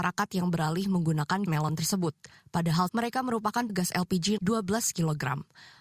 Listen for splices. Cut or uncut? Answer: cut